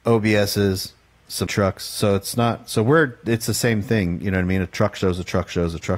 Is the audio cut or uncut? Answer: cut